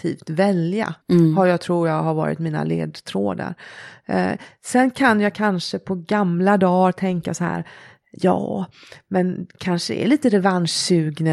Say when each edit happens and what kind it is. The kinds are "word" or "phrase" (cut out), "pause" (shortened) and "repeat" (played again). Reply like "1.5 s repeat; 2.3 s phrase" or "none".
1.0 s pause